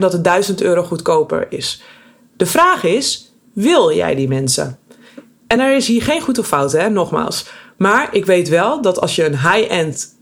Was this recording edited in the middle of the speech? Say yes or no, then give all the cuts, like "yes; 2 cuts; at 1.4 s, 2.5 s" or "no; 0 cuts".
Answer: no; 0 cuts